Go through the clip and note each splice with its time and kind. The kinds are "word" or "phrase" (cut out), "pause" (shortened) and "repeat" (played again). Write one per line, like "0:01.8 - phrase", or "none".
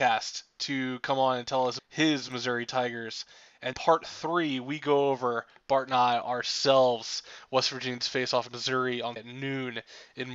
0:01.8 - word
0:03.7 - word
0:08.5 - word
0:09.2 - word